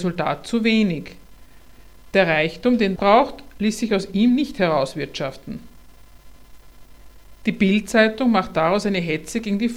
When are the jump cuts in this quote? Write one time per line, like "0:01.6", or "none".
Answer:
0:03.0